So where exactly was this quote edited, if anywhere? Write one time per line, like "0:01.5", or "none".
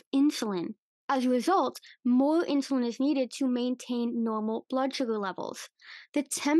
none